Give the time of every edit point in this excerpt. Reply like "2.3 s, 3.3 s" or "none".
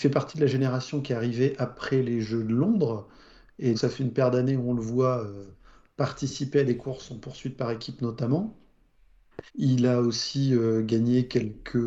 3.7 s, 9.5 s